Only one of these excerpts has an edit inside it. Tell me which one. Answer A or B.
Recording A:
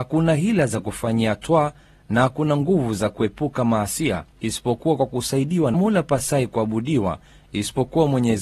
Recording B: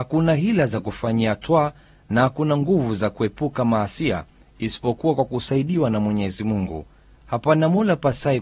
A